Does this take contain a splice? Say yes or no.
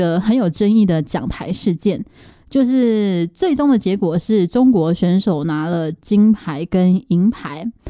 no